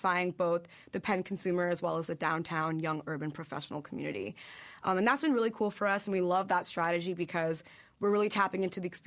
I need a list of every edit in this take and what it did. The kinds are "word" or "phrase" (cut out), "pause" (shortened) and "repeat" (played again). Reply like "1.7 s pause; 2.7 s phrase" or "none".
none